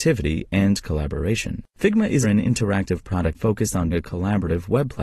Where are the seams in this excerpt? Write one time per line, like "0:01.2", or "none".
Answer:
0:01.7
0:02.2
0:03.3
0:03.9